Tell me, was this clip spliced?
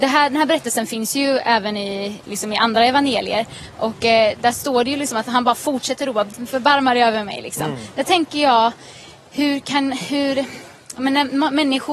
no; 0 cuts

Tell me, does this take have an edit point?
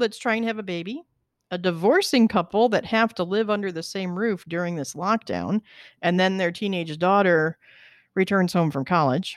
no; 0 cuts

